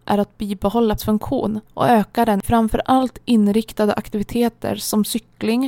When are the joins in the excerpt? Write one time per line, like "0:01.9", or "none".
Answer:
0:01.0
0:01.7
0:02.4